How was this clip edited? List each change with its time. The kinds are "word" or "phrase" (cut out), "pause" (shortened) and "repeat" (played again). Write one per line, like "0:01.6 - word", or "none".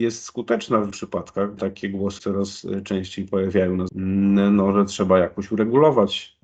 0:00.9 - word
0:01.6 - word
0:02.2 - word
0:03.9 - word